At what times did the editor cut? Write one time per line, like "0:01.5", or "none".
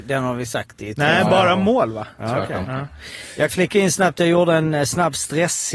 0:03.5